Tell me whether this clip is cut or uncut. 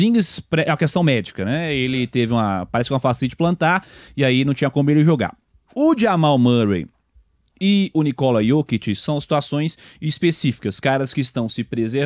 uncut